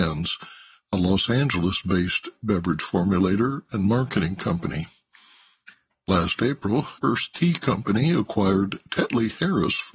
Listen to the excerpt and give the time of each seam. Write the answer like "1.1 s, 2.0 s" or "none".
7.0 s